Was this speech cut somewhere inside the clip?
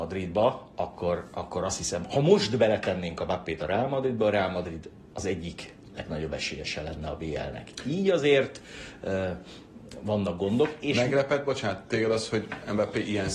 no; 0 cuts

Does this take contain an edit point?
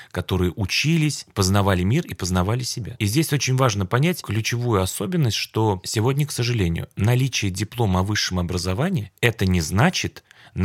no; 0 cuts

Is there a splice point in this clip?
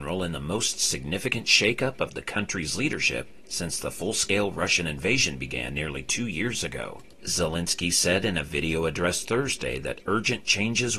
no; 0 cuts

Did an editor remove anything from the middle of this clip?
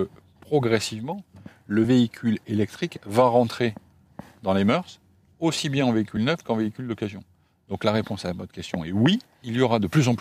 no; 0 cuts

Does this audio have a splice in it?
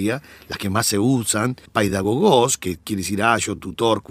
yes; 1 cut; at 1.7 s

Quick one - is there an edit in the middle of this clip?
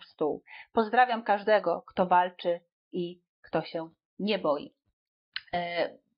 no; 0 cuts

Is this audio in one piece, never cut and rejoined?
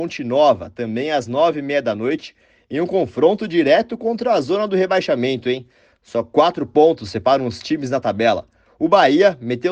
yes; 0 cuts

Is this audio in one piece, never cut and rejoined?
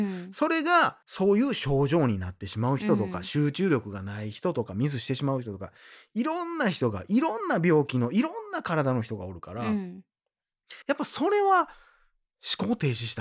no; 1 cut; at 10.8 s

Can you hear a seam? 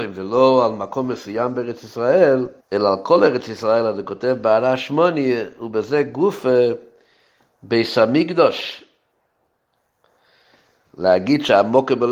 yes; 1 cut; at 2.6 s

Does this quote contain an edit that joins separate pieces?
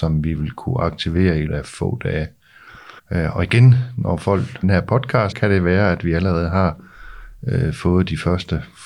yes; 4 cuts; at 1.5 s, 3.0 s, 4.6 s, 5.3 s

